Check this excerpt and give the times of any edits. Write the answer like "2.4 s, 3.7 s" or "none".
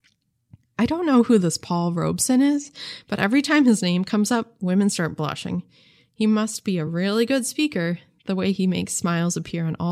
none